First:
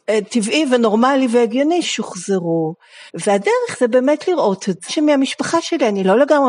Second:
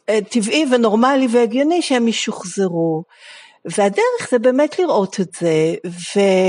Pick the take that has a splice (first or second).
first